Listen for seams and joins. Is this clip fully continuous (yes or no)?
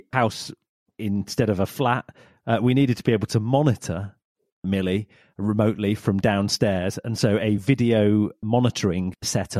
yes